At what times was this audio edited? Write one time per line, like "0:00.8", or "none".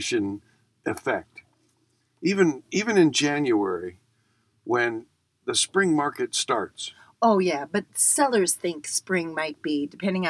none